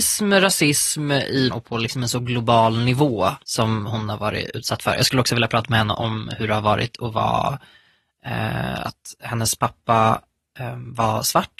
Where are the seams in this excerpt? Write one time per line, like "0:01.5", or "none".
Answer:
0:01.5
0:03.4